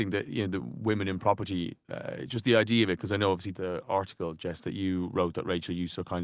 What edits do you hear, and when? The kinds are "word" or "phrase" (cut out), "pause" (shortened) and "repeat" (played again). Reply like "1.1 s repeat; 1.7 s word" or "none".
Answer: none